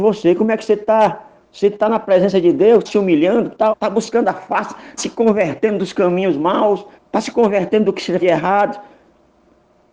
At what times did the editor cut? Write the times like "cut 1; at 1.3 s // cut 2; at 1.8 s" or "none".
cut 1; at 1.4 s // cut 2; at 2.9 s // cut 3; at 3.7 s // cut 4; at 5.0 s // cut 5; at 7.0 s // cut 6; at 8.2 s

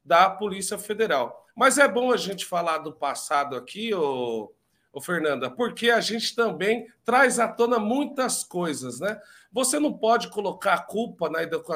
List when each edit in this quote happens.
none

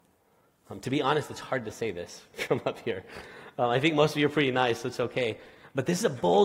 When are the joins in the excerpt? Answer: none

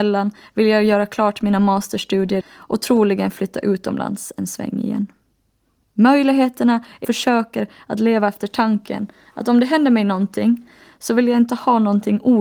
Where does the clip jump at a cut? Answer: cut 1; at 2.4 s // cut 2; at 7.0 s

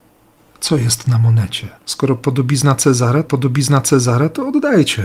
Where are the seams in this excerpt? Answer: cut 1; at 1.8 s // cut 2; at 3.2 s

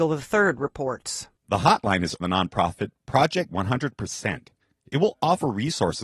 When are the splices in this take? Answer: cut 1; at 2.2 s // cut 2; at 3.5 s

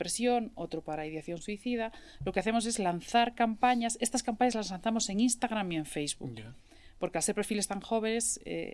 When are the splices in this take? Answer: none

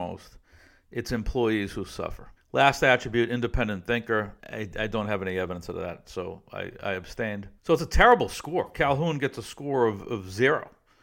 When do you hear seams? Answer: cut 1; at 2.4 s // cut 2; at 4.4 s // cut 3; at 7.6 s

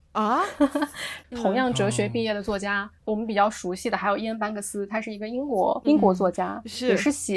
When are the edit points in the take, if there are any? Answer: cut 1; at 3.0 s // cut 2; at 5.8 s

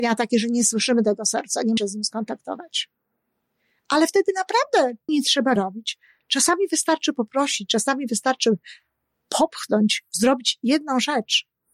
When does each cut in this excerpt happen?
cut 1; at 1.8 s // cut 2; at 5.1 s // cut 3; at 5.6 s

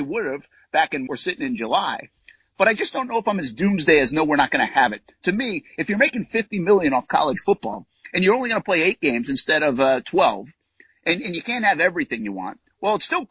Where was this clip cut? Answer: cut 1; at 1.1 s

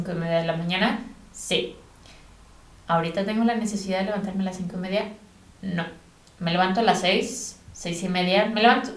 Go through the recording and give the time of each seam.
none

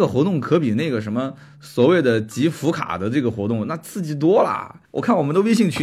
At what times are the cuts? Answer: cut 1; at 4.8 s

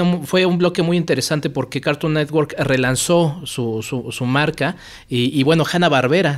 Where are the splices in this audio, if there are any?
none

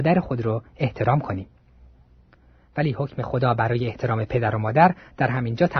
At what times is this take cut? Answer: none

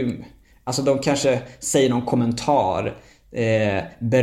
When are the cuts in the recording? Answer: none

